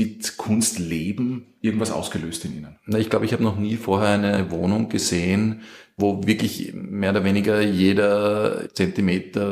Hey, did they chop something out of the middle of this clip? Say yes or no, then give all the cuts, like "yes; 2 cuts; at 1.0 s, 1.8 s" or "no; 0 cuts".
no; 0 cuts